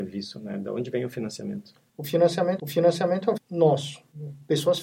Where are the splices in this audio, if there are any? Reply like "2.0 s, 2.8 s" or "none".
1.9 s, 2.6 s, 3.4 s